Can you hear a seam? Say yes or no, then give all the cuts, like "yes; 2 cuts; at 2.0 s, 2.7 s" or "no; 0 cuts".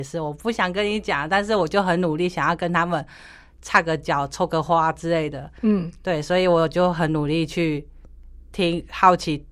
no; 0 cuts